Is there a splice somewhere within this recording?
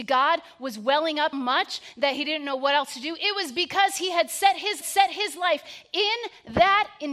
yes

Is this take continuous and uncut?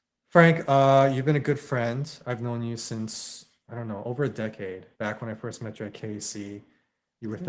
no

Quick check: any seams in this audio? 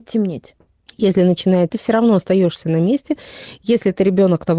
yes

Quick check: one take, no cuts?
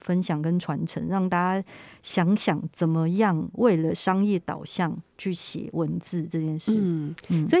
yes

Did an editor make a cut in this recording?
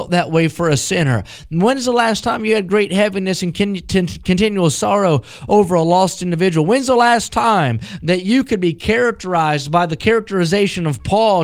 no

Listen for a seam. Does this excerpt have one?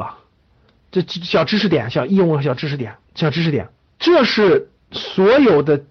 yes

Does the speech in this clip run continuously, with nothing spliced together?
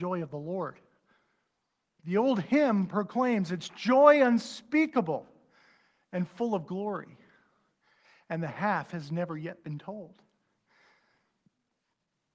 yes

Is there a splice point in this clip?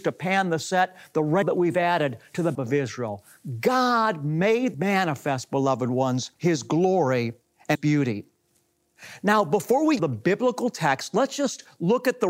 yes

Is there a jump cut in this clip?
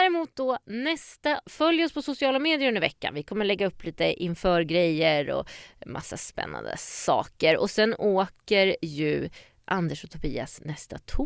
yes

